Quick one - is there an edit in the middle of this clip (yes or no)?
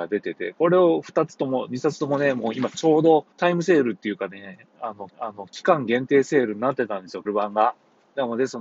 yes